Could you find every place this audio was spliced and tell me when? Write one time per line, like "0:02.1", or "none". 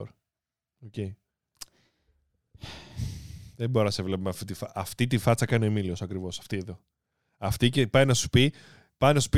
none